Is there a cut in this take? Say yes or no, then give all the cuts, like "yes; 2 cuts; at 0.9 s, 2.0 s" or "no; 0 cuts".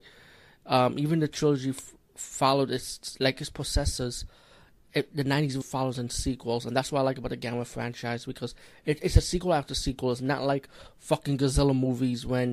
yes; 3 cuts; at 2.0 s, 3.3 s, 5.6 s